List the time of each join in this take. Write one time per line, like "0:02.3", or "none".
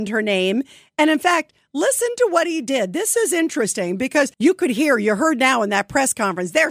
0:04.3